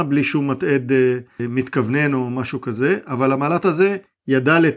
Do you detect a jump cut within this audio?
no; 0 cuts

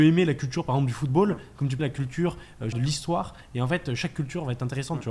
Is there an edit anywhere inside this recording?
yes; 2 cuts; at 1.8 s, 2.7 s

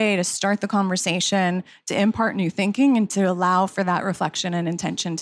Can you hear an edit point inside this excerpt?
no; 0 cuts

